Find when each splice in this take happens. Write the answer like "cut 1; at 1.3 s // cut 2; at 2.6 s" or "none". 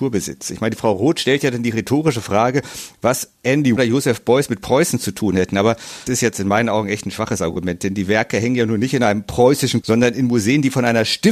cut 1; at 3.8 s // cut 2; at 6.1 s // cut 3; at 9.8 s